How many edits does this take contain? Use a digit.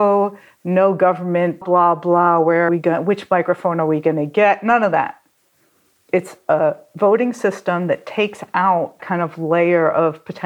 3